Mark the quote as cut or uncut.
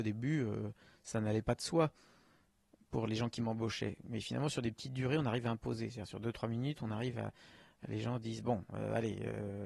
uncut